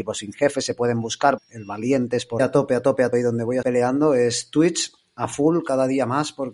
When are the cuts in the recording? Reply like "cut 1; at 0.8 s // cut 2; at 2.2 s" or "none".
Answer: cut 1; at 1.4 s // cut 2; at 2.4 s // cut 3; at 3.1 s // cut 4; at 3.6 s